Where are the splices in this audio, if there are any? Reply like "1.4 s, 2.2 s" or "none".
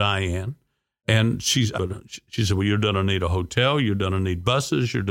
1.8 s